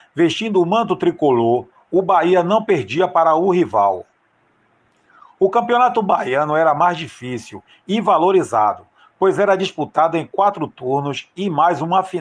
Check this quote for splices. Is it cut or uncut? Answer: uncut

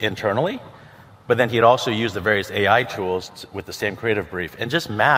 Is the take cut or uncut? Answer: uncut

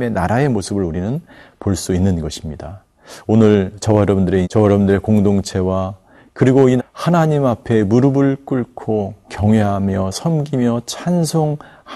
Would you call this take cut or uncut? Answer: cut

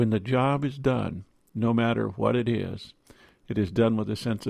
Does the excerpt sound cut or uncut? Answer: uncut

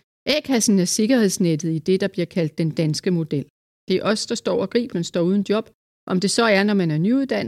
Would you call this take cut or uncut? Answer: cut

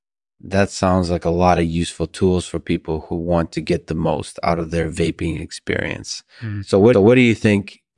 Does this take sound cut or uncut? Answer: cut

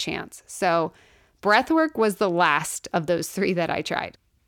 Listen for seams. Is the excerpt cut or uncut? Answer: uncut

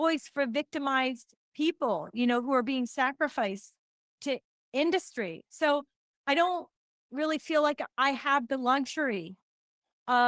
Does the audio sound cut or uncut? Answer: uncut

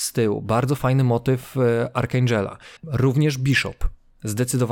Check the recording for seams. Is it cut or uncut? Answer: cut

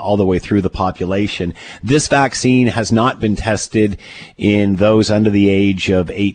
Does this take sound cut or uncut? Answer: uncut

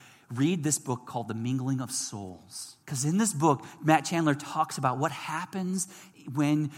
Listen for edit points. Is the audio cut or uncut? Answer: cut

